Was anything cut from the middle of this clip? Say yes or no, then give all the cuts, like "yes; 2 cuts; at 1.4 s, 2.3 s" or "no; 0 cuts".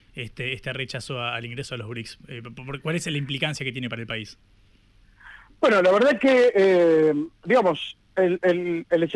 no; 0 cuts